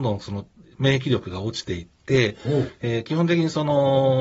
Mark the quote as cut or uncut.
uncut